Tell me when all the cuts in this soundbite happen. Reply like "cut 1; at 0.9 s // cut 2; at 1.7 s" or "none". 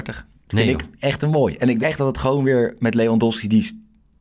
cut 1; at 1.8 s